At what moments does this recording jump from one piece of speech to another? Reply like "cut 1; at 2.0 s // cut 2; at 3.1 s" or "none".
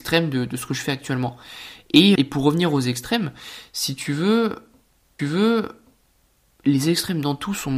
cut 1; at 2.2 s // cut 2; at 5.2 s